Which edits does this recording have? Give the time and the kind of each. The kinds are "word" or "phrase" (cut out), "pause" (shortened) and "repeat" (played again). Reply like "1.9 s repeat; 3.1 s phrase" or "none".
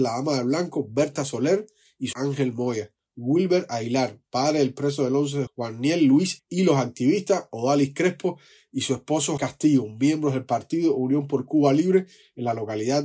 2.1 s word; 5.5 s word; 6.4 s word; 9.4 s word